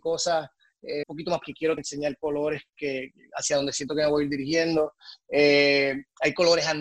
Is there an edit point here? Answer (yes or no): yes